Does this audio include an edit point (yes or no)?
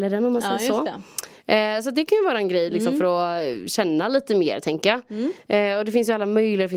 no